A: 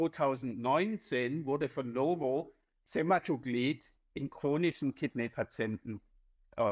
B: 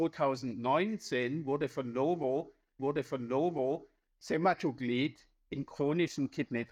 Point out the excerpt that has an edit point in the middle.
B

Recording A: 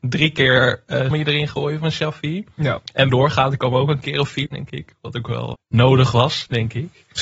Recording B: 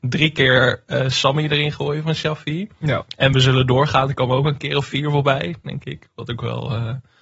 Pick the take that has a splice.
A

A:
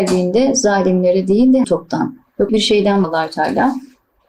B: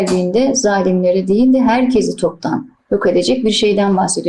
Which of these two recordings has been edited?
A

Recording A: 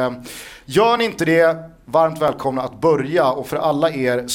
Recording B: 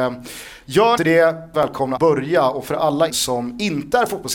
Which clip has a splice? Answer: B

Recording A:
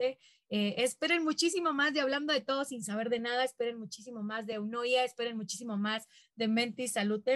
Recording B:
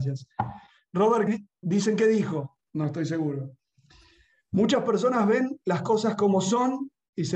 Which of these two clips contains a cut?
B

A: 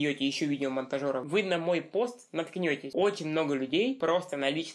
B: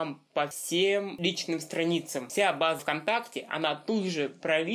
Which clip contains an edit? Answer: B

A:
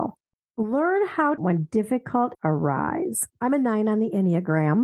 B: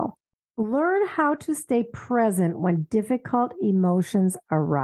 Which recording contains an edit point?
A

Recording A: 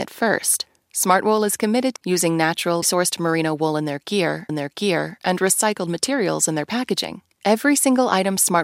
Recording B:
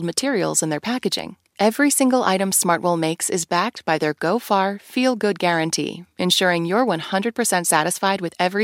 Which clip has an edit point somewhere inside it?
A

